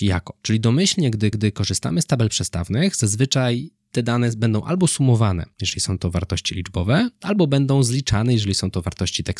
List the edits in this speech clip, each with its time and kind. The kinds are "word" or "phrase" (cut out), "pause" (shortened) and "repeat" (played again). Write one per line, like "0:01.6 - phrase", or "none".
0:01.3 - repeat